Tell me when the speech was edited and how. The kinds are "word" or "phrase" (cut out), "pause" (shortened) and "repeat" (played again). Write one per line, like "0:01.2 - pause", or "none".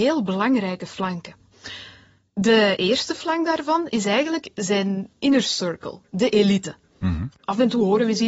none